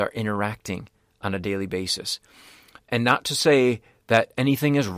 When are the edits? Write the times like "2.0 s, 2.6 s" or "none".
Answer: none

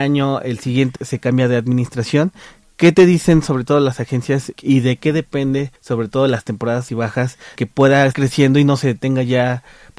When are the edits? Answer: 1.0 s, 4.6 s, 5.8 s, 6.9 s, 7.6 s, 8.1 s

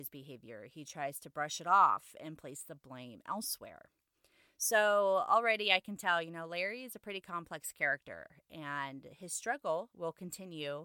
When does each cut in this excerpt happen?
none

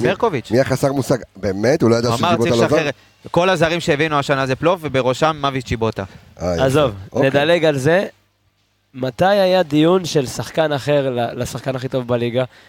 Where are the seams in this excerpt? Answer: none

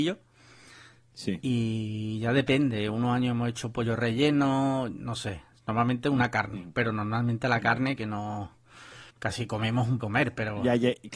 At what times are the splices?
8.0 s, 9.1 s, 10.0 s

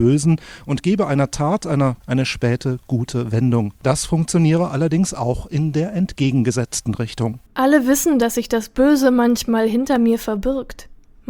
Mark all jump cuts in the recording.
2.0 s, 3.8 s, 7.5 s

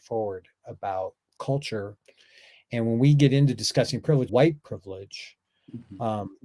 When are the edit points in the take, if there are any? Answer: 1.4 s, 4.3 s

